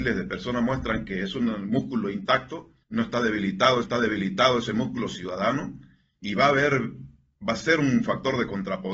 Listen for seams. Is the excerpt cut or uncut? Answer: cut